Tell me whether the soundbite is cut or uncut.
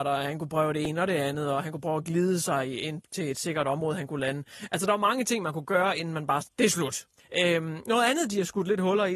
cut